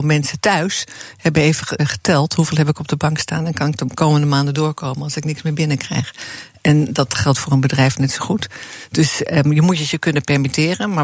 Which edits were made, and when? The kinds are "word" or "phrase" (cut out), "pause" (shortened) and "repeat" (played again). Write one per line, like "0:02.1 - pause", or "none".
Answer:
0:01.8 - word